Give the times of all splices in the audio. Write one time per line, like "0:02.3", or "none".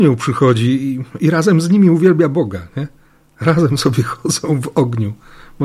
none